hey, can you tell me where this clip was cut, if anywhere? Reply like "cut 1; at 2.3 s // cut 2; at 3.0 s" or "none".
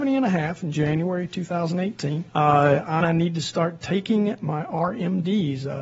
cut 1; at 2.3 s // cut 2; at 3.0 s